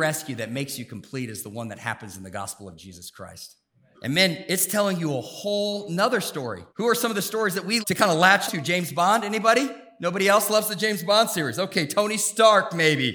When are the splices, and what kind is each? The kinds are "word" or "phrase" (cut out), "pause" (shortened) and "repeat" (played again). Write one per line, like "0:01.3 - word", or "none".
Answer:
0:03.9 - word
0:06.7 - pause
0:07.8 - word
0:08.5 - word